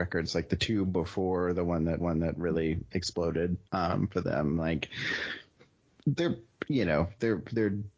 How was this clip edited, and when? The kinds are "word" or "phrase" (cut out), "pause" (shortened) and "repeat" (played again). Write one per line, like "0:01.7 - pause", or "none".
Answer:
0:02.0 - repeat
0:03.7 - pause